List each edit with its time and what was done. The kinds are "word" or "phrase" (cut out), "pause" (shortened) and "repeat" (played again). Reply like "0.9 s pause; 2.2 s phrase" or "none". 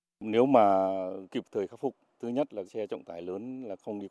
1.3 s word; 2.2 s word; 2.6 s word